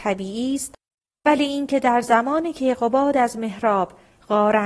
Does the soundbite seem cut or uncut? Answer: uncut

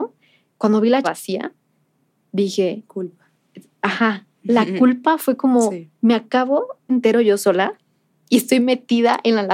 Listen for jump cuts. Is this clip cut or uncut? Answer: cut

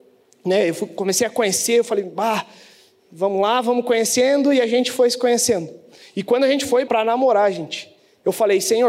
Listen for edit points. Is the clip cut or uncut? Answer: cut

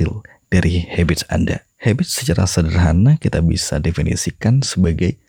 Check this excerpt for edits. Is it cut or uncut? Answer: cut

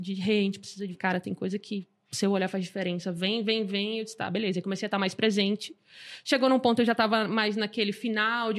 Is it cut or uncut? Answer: cut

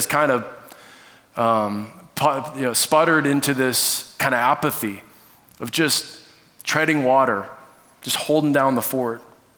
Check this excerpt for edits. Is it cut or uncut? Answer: uncut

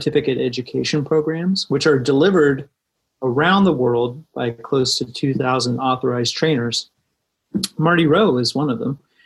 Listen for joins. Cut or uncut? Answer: uncut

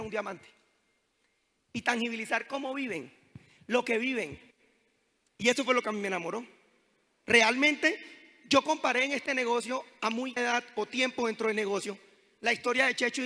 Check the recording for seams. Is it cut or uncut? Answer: cut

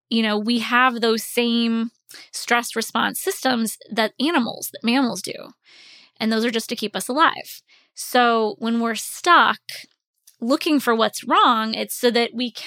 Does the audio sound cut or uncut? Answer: uncut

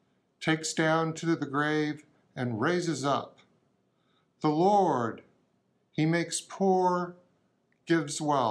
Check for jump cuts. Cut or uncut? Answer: uncut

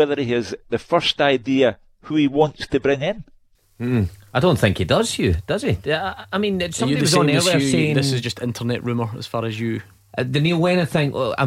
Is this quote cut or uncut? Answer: cut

